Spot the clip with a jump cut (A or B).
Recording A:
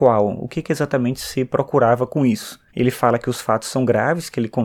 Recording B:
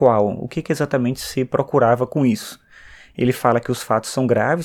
A